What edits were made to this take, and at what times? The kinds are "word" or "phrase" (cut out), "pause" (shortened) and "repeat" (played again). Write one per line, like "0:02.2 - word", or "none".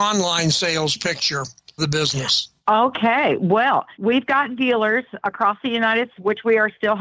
0:01.8 - word
0:02.6 - pause
0:03.9 - pause
0:05.2 - word
0:06.1 - word